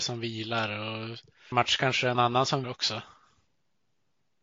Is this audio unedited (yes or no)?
no